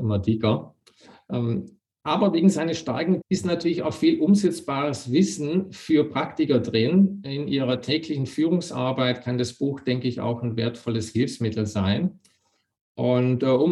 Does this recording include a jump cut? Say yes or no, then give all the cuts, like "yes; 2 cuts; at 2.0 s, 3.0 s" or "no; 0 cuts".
yes; 1 cut; at 3.2 s